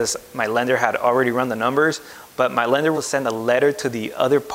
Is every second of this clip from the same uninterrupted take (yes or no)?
no